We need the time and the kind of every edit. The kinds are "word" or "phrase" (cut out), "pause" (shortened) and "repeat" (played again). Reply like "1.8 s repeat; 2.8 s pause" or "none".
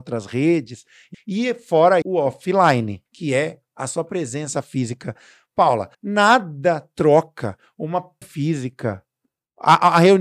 1.1 s phrase; 2.0 s word; 3.1 s pause; 5.9 s pause; 8.2 s word